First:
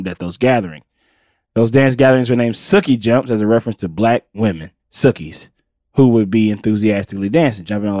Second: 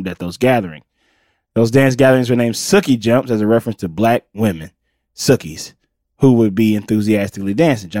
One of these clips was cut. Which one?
first; 1 cut; at 4.8 s

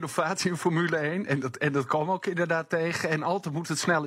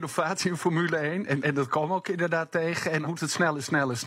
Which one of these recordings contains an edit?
second; 2 cuts; at 1.4 s, 3.0 s

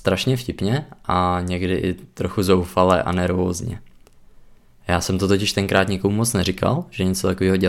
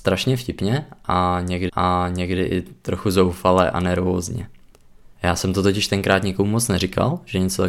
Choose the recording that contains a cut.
second; 2 cuts; at 1.7 s, 5.1 s

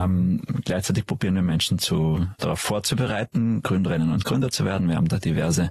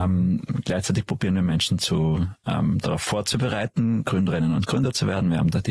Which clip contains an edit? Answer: first; 1 cut; at 2.4 s

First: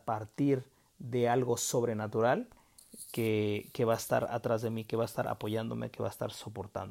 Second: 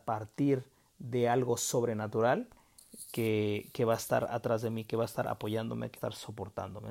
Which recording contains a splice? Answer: second; 1 cut; at 6.0 s

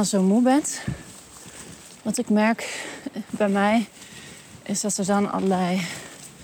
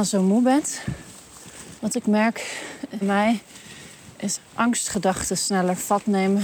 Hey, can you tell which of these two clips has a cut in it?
second; 3 cuts; at 1.8 s, 3.0 s, 4.4 s

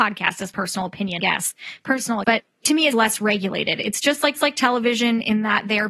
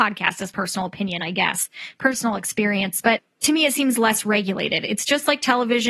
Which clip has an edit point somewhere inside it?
first; 4 cuts; at 1.2 s, 2.2 s, 2.9 s, 4.4 s

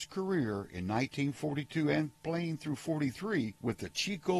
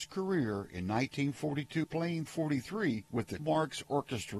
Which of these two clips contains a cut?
second; 3 cuts; at 1.8 s, 2.3 s, 3.4 s

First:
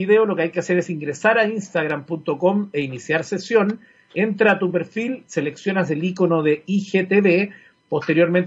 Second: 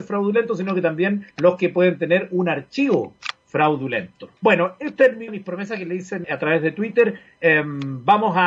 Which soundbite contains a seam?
second; 4 cuts; at 1.3 s, 4.4 s, 5.3 s, 6.2 s

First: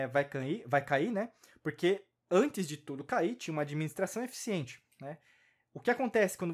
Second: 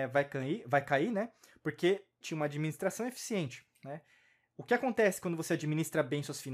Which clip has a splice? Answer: second; 1 cut; at 2.2 s

